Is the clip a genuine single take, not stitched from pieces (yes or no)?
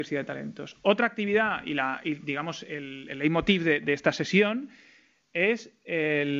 yes